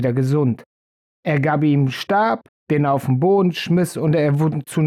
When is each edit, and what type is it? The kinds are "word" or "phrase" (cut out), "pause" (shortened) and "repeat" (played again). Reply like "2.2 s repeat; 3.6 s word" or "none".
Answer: 2.5 s pause